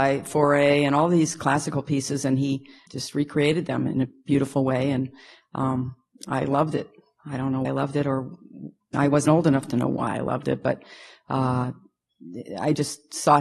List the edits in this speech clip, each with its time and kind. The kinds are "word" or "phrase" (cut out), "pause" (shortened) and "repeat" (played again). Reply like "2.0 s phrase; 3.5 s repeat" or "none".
2.9 s word; 7.6 s word; 8.9 s word; 9.3 s word